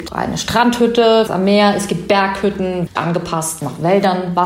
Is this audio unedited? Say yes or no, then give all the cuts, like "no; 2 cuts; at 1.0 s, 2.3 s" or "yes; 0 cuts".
no; 2 cuts; at 1.3 s, 2.9 s